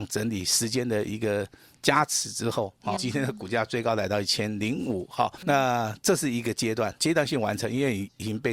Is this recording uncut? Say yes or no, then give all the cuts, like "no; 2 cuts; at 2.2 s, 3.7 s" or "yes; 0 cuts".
no; 3 cuts; at 3.0 s, 5.4 s, 7.0 s